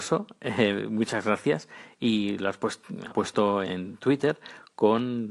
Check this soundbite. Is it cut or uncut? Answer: cut